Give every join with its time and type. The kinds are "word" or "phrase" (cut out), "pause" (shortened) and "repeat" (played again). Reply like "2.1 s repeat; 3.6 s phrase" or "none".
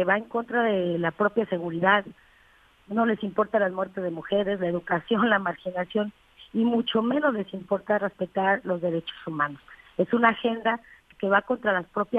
11.1 s word